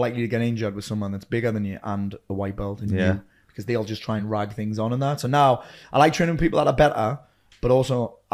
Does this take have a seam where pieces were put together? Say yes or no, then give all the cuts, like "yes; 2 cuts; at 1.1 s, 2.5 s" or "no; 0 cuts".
no; 0 cuts